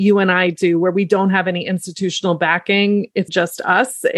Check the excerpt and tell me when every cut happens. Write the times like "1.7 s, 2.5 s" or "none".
3.3 s